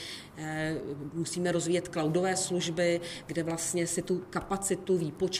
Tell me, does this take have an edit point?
no; 0 cuts

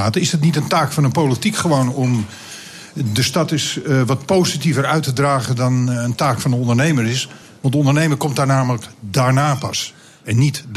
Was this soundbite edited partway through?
no; 0 cuts

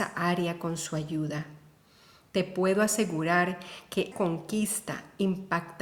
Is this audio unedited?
no; 1 cut; at 4.1 s

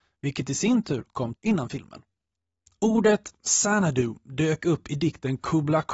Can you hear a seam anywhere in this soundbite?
yes; 2 cuts; at 1.4 s, 2.4 s

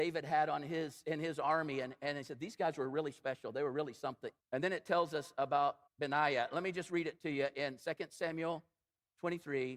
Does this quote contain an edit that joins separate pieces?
yes; 2 cuts; at 4.4 s, 5.9 s

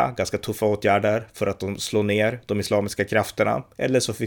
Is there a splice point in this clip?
no; 0 cuts

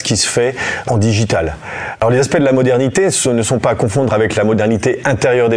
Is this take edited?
no; 0 cuts

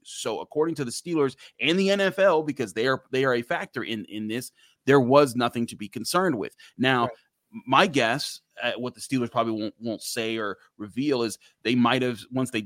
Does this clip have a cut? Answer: no; 0 cuts

